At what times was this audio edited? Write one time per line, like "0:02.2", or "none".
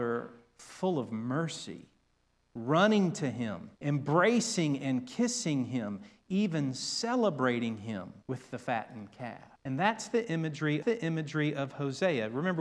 0:03.7
0:08.2
0:09.6
0:10.8